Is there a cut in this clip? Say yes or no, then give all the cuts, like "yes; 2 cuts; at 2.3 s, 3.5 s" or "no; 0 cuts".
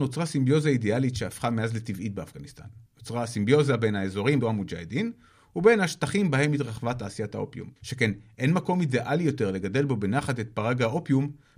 yes; 3 cuts; at 2.9 s, 4.4 s, 7.8 s